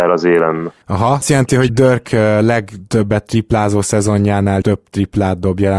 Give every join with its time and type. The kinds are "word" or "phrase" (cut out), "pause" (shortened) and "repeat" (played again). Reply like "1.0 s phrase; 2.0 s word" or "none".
1.2 s phrase; 1.7 s word; 4.6 s word